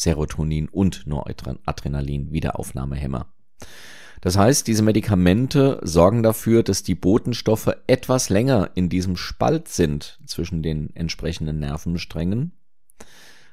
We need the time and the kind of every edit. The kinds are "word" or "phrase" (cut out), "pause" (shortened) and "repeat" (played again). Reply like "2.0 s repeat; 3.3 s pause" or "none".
none